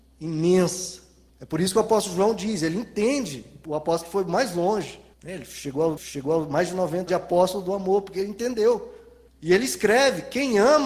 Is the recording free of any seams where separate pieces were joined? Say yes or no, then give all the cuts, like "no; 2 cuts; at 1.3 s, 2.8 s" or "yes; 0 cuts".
no; 6 cuts; at 1.3 s, 3.6 s, 5.1 s, 6.0 s, 7.1 s, 9.3 s